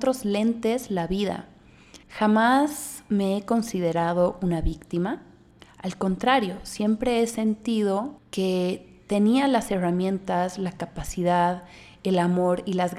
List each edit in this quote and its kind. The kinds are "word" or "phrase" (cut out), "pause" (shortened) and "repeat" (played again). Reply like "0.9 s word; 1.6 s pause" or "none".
2.0 s pause; 8.2 s pause